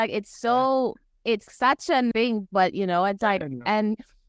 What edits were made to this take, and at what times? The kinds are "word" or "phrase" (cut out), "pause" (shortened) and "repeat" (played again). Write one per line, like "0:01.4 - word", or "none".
0:01.5 - word
0:02.1 - word
0:03.2 - word

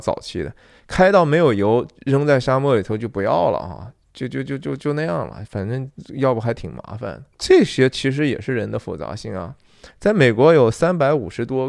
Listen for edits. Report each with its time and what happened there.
0:07.3 - pause

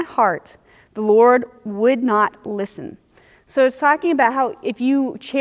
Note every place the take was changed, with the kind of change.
none

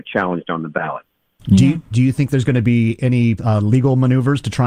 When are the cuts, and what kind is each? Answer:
0:03.4 - word

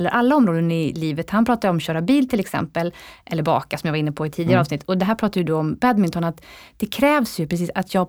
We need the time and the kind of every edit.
none

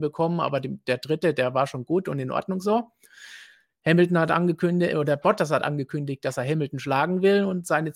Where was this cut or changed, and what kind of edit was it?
none

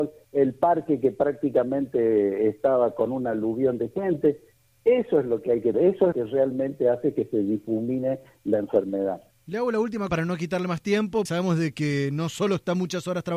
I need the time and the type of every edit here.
0:05.7 - word
0:06.1 - word
0:10.1 - word
0:11.3 - word

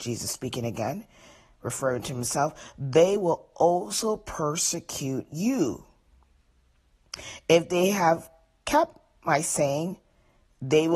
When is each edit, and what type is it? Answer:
none

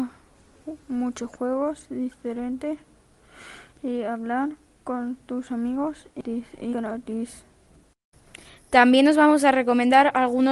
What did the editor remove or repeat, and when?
0:06.7 - word

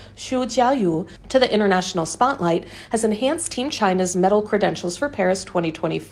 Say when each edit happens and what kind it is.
none

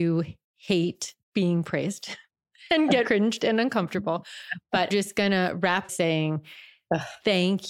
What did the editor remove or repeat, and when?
0:01.2 - pause
0:03.0 - word
0:04.9 - word
0:05.9 - phrase

